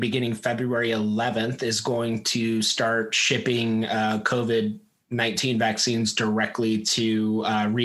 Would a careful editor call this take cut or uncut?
uncut